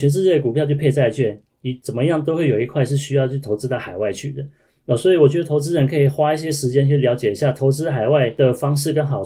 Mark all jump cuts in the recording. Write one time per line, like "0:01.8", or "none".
0:01.5